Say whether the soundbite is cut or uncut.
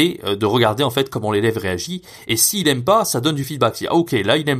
uncut